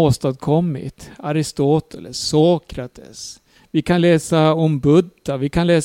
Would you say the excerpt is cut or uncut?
cut